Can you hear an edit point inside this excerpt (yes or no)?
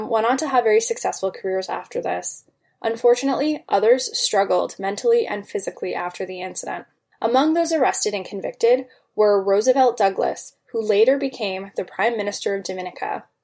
no